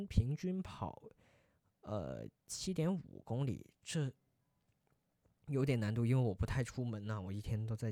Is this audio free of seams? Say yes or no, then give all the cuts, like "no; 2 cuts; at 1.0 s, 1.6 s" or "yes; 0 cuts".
yes; 0 cuts